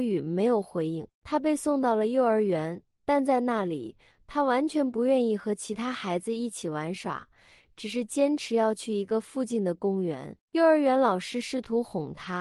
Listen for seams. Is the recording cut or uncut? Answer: uncut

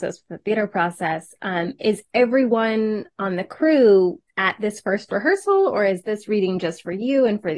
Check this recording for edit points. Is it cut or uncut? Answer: cut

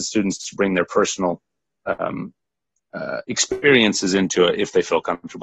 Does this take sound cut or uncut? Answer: uncut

